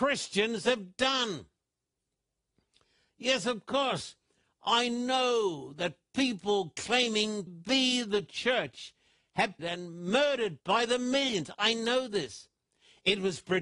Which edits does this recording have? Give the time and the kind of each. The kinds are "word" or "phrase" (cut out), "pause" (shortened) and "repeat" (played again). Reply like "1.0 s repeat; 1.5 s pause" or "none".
7.5 s word; 9.6 s word; 10.6 s word